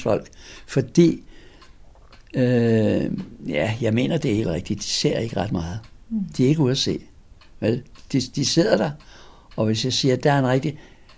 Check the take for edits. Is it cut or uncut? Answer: uncut